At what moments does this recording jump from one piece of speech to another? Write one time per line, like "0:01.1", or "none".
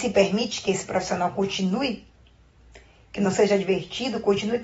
none